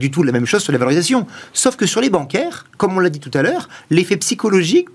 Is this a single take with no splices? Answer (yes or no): yes